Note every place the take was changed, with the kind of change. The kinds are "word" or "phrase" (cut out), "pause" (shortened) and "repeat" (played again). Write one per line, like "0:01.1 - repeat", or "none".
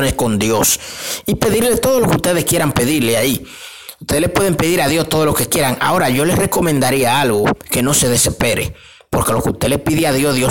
none